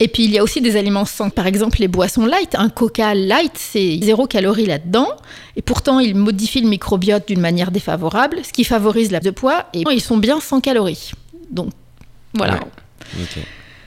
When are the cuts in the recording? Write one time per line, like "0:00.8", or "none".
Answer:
0:01.3
0:04.0
0:09.2
0:09.9